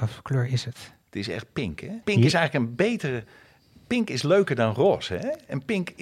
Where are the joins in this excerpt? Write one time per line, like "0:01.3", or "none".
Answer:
0:01.0
0:02.0